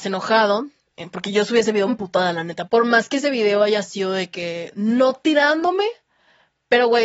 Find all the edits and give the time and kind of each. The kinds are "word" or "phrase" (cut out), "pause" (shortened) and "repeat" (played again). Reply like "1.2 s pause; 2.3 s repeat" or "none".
1.9 s word; 2.7 s word